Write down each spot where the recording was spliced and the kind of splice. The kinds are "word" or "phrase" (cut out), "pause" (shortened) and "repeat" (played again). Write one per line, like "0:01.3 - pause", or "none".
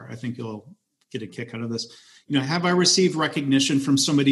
none